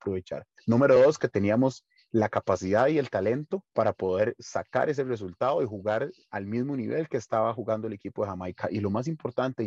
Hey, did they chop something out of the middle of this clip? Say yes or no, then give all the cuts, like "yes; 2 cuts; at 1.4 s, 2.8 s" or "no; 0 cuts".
no; 0 cuts